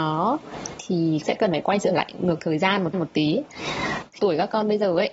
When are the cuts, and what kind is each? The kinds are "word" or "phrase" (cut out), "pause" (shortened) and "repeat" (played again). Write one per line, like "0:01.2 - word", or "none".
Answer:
0:01.2 - word
0:02.9 - repeat
0:04.2 - phrase